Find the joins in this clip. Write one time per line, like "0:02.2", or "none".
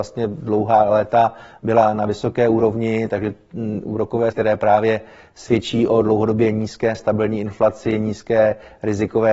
0:04.3